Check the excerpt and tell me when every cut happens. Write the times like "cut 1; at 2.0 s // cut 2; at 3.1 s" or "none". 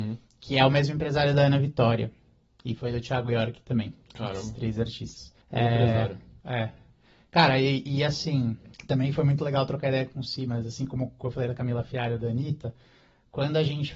cut 1; at 5.4 s // cut 2; at 8.7 s